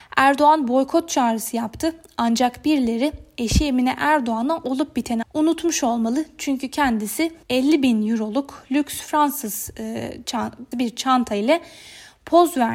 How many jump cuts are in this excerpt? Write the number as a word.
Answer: three